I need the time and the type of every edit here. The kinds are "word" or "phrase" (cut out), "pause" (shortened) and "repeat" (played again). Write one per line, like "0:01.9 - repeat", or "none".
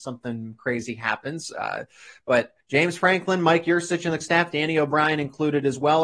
0:02.6 - pause
0:04.2 - word